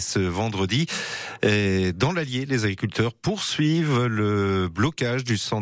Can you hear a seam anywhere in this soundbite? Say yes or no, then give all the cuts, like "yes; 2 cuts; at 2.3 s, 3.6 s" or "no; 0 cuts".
no; 0 cuts